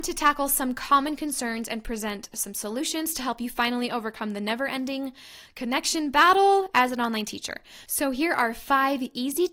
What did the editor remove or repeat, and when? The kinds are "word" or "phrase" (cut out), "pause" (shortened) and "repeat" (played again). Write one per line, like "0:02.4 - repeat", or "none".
none